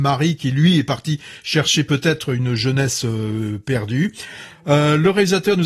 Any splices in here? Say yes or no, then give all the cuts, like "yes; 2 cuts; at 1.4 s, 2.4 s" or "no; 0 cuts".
no; 0 cuts